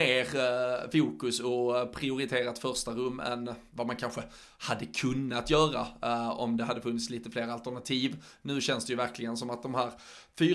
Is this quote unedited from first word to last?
yes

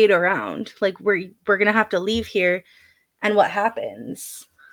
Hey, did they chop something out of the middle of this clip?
no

